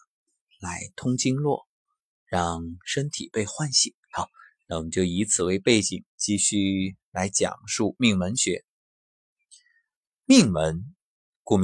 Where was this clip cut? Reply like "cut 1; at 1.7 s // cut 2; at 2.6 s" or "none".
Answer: cut 1; at 4.0 s // cut 2; at 6.1 s